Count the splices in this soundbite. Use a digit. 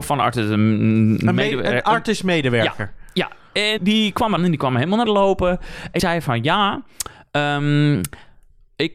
4